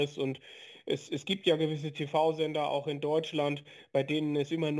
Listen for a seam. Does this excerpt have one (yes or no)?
no